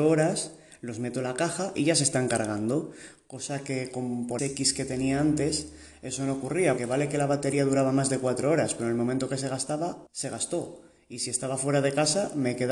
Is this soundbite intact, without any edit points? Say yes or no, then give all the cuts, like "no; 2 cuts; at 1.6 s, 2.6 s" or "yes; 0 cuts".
no; 3 cuts; at 4.4 s, 6.8 s, 10.1 s